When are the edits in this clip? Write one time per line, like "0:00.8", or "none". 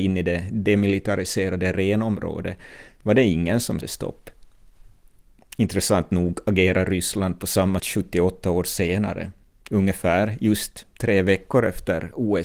0:03.8
0:07.8
0:09.5